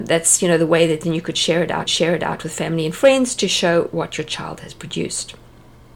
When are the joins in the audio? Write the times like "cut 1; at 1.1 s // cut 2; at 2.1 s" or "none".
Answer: cut 1; at 1.9 s